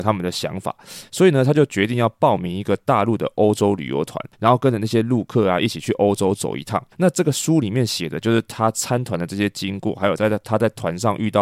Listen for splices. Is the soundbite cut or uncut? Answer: cut